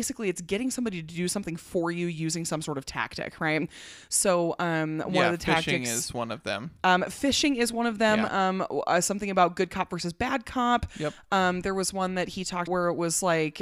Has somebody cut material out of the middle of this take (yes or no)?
yes